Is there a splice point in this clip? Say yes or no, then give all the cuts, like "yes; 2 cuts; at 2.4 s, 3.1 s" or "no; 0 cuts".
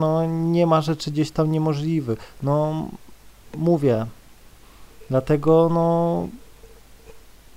no; 0 cuts